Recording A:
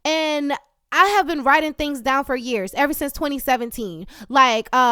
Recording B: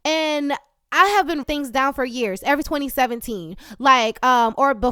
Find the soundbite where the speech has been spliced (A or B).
B